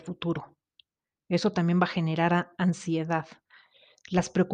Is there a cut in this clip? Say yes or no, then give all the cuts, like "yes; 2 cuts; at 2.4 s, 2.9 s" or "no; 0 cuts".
no; 0 cuts